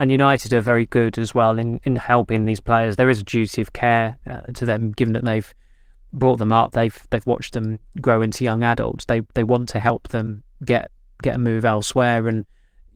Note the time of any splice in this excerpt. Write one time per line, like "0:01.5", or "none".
none